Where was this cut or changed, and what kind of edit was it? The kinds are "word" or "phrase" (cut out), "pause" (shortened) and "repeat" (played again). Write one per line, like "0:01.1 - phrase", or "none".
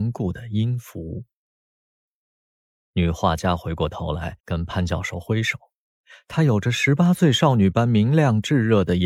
0:04.4 - pause